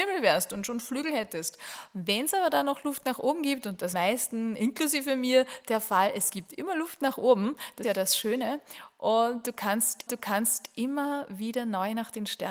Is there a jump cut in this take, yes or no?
yes